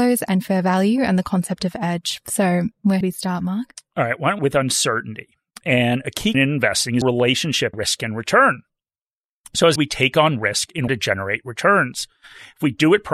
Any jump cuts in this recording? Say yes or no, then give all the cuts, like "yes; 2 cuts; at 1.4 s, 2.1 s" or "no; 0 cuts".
yes; 7 cuts; at 3.0 s, 4.4 s, 6.3 s, 7.0 s, 7.7 s, 9.8 s, 10.9 s